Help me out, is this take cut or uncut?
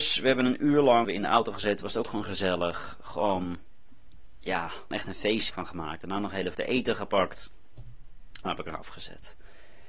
cut